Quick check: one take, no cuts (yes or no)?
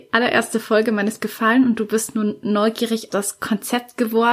no